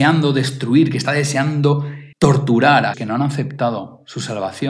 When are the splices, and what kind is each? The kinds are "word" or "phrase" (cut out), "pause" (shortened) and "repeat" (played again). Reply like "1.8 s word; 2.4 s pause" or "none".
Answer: 2.1 s pause; 2.9 s word